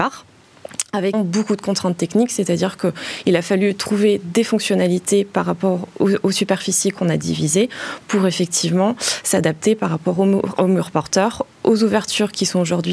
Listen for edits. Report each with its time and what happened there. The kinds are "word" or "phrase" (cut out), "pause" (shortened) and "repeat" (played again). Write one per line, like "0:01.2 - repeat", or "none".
0:01.1 - word